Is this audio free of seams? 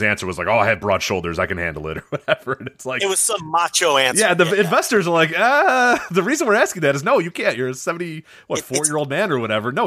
yes; 0 cuts

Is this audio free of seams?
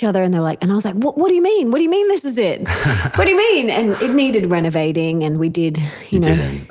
yes; 0 cuts

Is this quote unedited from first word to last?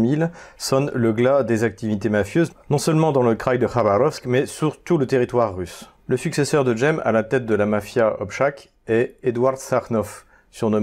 yes; 0 cuts

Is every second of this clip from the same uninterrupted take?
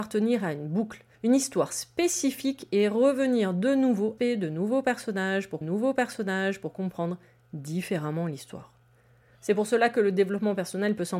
no; 3 cuts; at 1.1 s, 4.2 s, 5.6 s

